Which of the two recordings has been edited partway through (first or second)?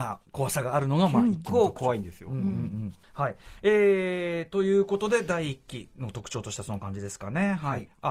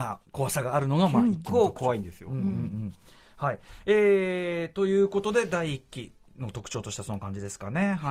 first